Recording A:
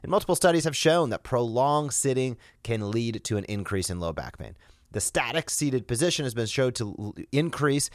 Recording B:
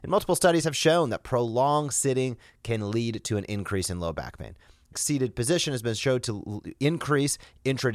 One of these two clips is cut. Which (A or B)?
B